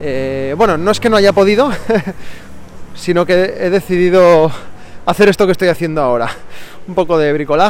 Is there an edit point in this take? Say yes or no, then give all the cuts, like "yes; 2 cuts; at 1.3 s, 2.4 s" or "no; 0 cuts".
no; 0 cuts